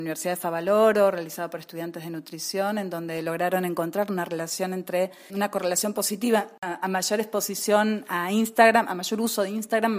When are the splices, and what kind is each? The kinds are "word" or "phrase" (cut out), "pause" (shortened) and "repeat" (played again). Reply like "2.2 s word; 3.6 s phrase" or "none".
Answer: 5.3 s word